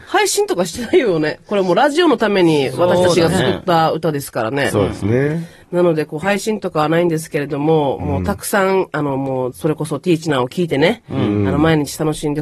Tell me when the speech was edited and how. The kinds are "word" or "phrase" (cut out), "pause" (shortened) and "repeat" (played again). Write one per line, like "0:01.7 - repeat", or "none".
0:05.6 - pause
0:09.5 - phrase